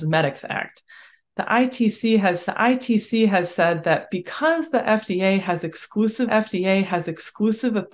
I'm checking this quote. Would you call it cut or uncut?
cut